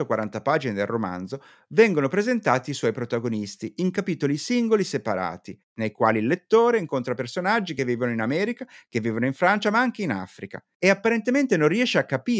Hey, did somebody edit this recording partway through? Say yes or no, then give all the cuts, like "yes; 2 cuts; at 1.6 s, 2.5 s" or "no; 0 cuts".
no; 0 cuts